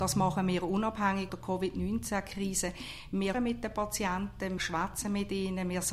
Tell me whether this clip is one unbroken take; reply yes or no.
no